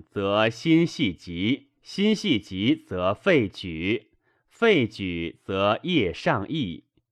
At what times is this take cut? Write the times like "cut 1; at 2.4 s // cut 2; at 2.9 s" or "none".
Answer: cut 1; at 1.8 s